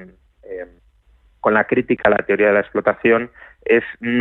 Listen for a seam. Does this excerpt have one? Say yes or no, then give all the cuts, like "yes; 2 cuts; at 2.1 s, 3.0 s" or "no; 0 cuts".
no; 0 cuts